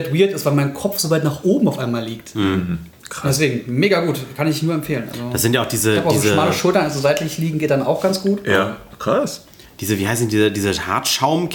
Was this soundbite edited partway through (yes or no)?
no